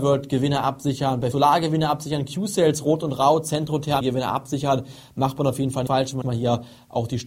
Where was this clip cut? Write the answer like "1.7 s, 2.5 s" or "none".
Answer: 1.3 s, 4.0 s, 5.9 s, 6.2 s